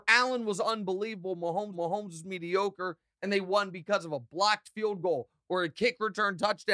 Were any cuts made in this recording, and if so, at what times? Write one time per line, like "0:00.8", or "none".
0:01.7